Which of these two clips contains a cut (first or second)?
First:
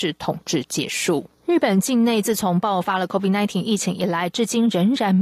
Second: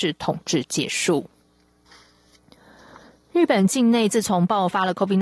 first